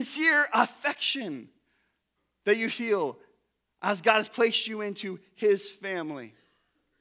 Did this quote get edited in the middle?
no; 0 cuts

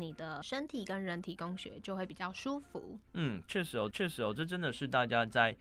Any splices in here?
yes; 2 cuts; at 3.1 s, 3.9 s

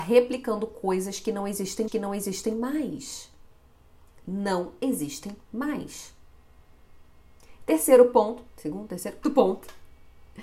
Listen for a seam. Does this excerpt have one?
yes; 3 cuts; at 1.9 s, 8.5 s, 9.2 s

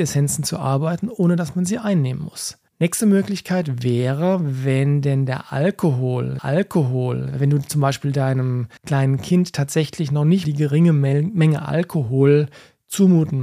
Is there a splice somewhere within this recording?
yes; 4 cuts; at 2.7 s, 6.4 s, 8.8 s, 10.4 s

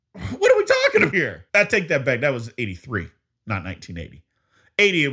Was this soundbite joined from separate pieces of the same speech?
yes; 2 cuts; at 1.1 s, 1.5 s

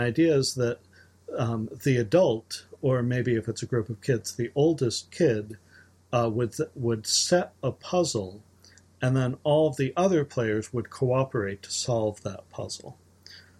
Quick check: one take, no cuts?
yes; 0 cuts

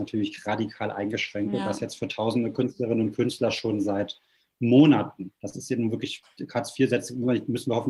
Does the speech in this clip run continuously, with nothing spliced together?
no; 1 cut; at 5.4 s

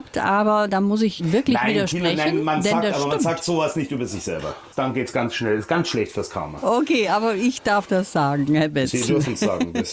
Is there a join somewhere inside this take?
no; 0 cuts

